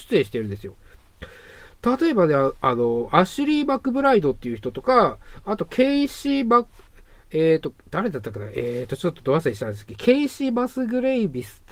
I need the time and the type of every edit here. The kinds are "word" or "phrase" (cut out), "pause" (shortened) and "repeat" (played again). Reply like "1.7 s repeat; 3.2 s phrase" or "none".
none